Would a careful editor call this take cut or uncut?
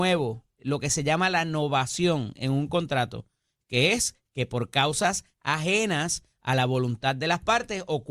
uncut